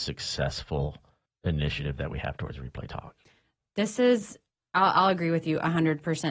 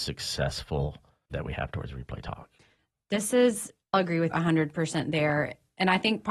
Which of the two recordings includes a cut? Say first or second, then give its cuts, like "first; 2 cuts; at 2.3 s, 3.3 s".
second; 3 cuts; at 1.3 s, 3.9 s, 4.3 s